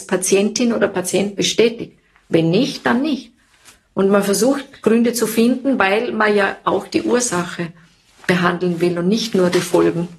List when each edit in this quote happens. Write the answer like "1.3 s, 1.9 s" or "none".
none